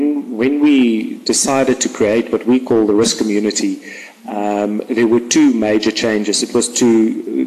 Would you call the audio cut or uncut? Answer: uncut